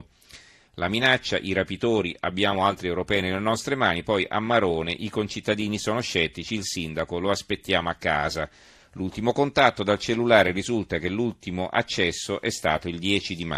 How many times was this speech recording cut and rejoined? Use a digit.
0